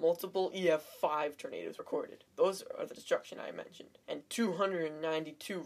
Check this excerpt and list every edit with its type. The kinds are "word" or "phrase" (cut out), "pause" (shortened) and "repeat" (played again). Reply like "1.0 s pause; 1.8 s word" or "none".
1.8 s word; 2.3 s pause; 3.0 s phrase; 4.0 s pause

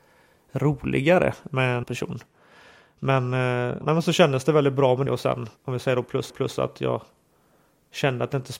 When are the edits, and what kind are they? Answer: 1.8 s word; 3.8 s word; 5.1 s word; 5.6 s pause; 6.3 s repeat

